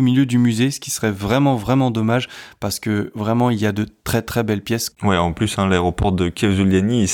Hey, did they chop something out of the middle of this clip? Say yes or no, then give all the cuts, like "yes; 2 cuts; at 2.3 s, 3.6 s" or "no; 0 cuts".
no; 0 cuts